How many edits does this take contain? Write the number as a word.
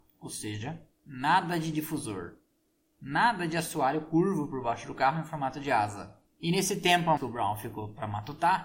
two